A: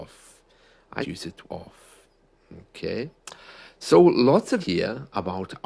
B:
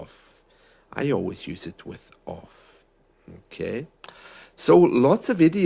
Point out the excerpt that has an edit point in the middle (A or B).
A